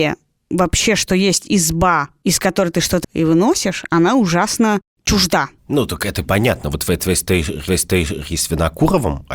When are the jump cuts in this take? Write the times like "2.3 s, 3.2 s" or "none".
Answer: 3.0 s, 5.6 s, 6.2 s, 7.7 s

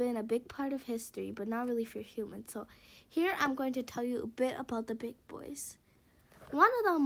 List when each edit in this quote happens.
none

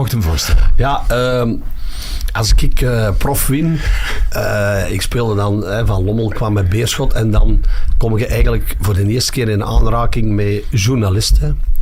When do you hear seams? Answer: none

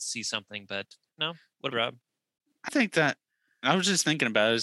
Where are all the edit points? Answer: 1.7 s, 2.7 s

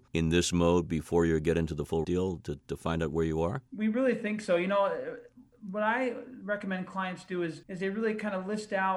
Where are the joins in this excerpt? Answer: 2.0 s, 3.7 s, 7.6 s

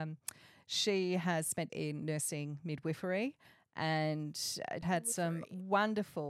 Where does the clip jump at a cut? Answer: 1.7 s, 4.8 s

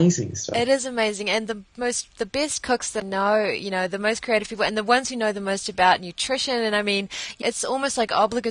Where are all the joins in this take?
3.0 s, 7.4 s

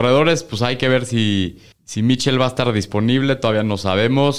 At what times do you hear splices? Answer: 1.7 s

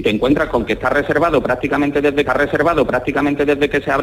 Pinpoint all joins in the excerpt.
2.3 s

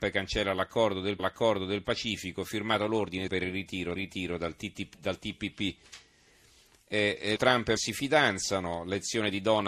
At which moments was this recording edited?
1.2 s, 3.3 s, 4.0 s, 7.4 s, 7.8 s

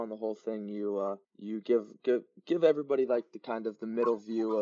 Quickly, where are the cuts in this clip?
1.2 s

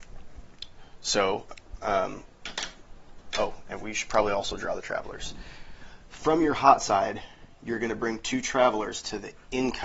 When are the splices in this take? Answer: none

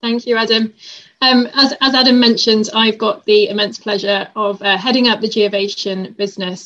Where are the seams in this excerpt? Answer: none

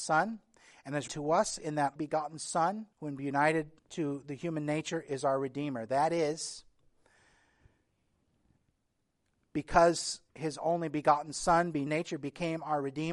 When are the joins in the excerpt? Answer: 1.1 s, 2.0 s, 2.9 s, 3.8 s, 10.3 s, 11.9 s

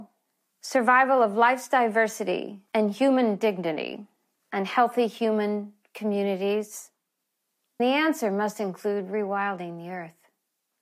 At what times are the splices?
2.7 s, 4.4 s, 7.8 s

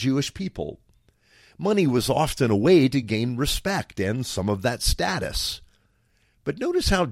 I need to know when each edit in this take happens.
none

